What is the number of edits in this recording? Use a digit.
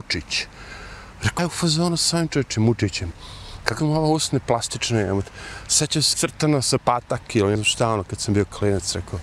6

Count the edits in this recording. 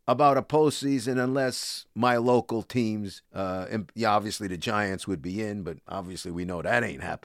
1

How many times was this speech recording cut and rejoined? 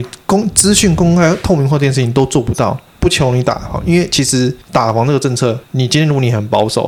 3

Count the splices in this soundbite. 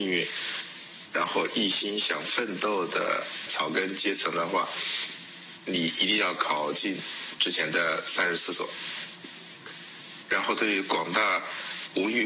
1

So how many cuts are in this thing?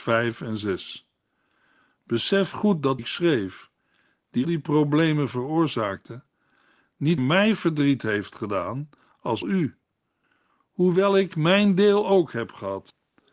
4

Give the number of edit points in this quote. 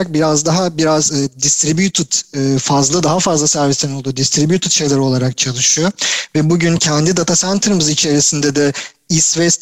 0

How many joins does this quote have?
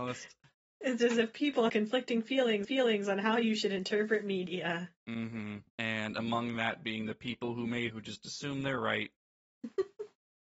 5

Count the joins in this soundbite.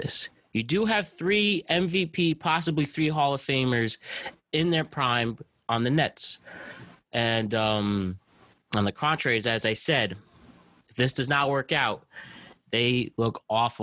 0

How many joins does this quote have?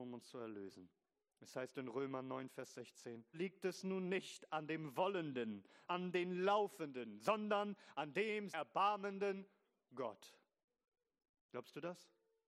3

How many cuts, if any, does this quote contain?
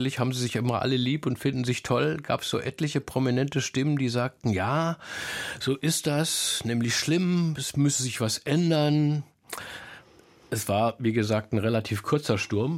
0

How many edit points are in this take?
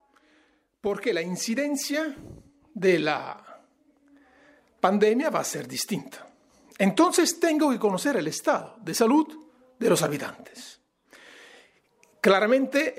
0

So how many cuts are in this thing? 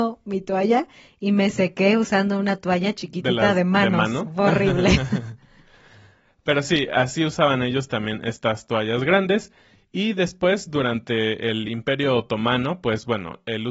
0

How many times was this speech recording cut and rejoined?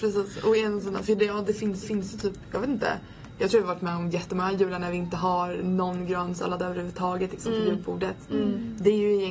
1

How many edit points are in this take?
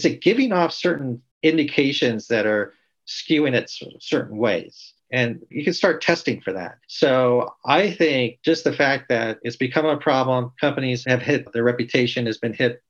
2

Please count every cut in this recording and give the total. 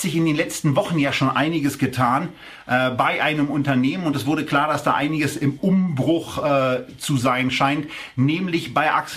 0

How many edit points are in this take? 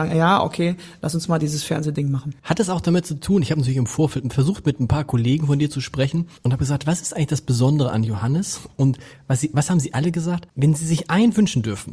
3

